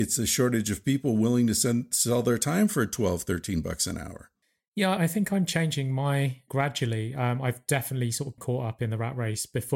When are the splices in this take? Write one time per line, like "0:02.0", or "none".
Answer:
0:05.0
0:06.5
0:08.4